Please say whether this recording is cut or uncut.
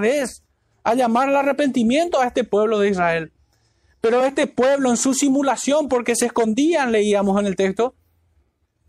uncut